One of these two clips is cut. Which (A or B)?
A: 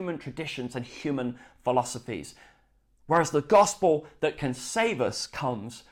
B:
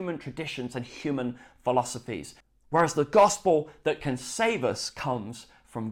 B